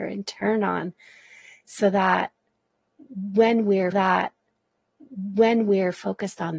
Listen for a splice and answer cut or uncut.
cut